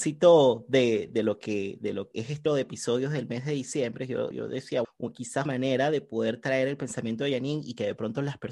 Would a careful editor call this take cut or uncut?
cut